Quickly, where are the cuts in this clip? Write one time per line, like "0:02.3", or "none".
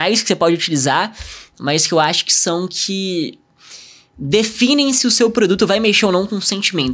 none